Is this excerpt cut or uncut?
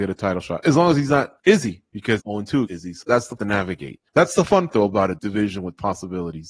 cut